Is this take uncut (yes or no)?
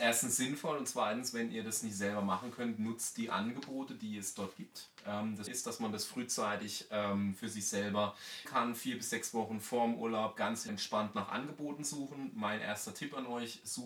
no